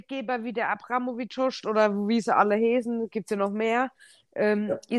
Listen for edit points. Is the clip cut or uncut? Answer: uncut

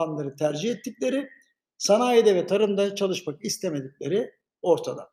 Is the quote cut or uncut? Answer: uncut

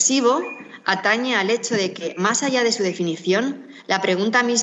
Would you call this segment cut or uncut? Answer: uncut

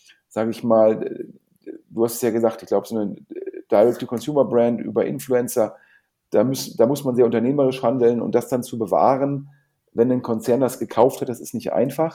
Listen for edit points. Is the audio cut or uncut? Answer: uncut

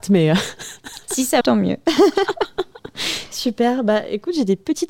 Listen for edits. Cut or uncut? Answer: cut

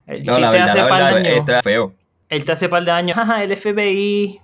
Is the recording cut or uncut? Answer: cut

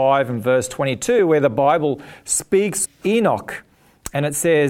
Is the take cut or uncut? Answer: cut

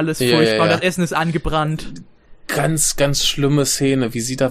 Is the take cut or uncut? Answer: uncut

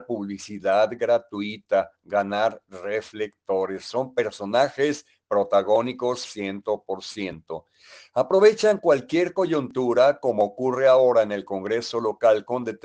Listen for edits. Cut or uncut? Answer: uncut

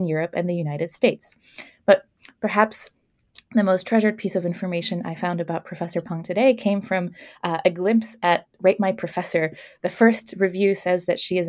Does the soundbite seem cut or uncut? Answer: uncut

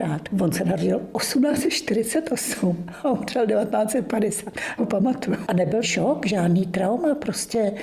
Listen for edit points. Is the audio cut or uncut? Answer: cut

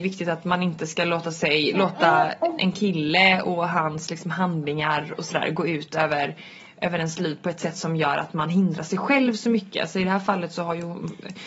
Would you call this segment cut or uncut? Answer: cut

